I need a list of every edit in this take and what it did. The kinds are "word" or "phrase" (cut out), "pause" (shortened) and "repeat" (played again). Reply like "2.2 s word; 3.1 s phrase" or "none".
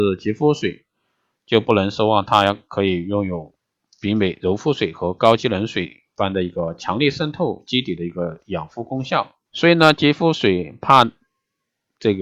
9.4 s pause